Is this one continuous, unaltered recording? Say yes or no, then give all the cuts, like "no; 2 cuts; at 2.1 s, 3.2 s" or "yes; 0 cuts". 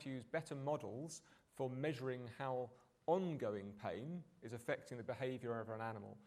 yes; 0 cuts